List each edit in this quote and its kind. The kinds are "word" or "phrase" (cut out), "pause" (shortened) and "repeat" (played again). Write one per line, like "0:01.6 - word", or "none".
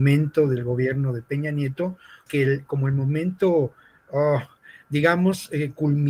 0:02.3 - word